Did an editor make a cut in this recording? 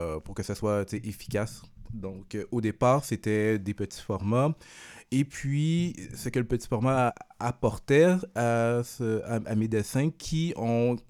yes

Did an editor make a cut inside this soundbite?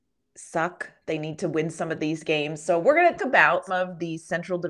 yes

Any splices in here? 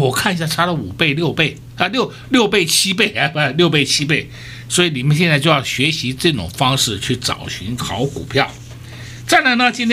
no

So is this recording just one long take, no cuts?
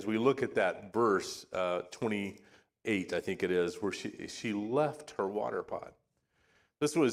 yes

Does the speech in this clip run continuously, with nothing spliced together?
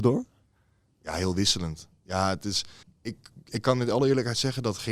no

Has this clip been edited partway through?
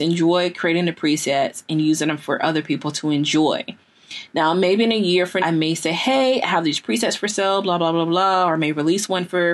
yes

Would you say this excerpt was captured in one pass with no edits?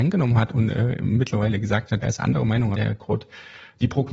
no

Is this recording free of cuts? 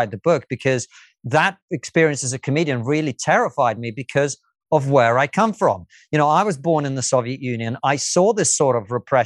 yes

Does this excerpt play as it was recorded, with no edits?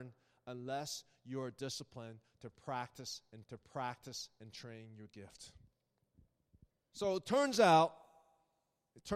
no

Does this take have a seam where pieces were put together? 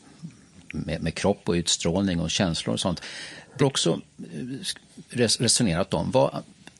yes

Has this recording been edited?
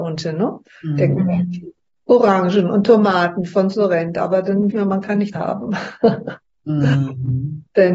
yes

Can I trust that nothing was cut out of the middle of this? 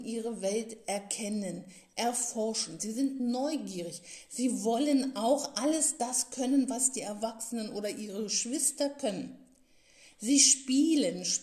yes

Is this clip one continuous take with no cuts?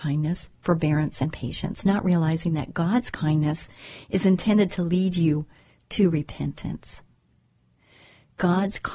yes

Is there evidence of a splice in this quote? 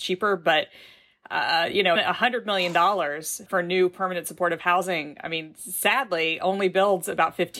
yes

